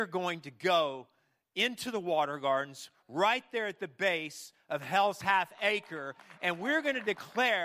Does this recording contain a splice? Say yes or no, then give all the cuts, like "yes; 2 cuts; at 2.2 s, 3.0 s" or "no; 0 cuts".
no; 0 cuts